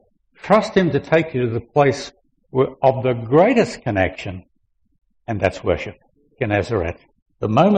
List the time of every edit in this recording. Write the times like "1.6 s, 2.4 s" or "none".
none

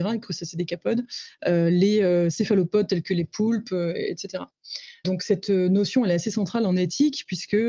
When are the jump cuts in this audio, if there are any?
none

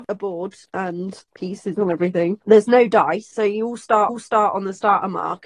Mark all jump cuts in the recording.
4.1 s

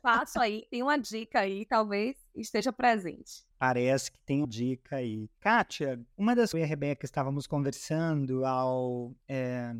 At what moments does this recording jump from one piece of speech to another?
3.5 s, 4.4 s, 6.1 s, 6.5 s

